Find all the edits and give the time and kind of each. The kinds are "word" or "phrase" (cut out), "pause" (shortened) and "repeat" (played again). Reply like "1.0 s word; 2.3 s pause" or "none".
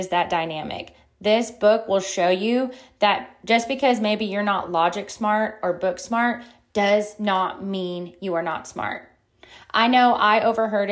none